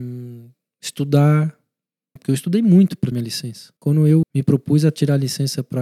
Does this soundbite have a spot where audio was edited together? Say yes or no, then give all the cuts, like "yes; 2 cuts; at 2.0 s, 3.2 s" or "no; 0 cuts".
yes; 4 cuts; at 2.2 s, 3.1 s, 3.8 s, 4.2 s